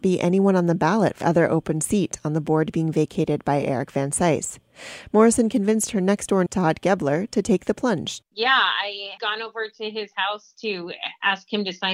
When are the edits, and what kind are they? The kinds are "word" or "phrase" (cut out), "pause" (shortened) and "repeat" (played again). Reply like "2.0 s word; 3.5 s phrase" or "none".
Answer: 1.2 s word; 6.5 s word; 8.3 s pause; 9.2 s word